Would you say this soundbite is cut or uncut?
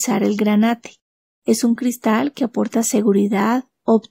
uncut